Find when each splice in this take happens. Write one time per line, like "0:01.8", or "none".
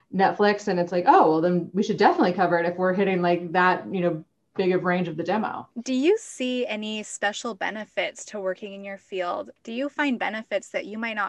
none